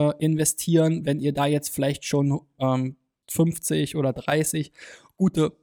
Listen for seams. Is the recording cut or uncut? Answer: uncut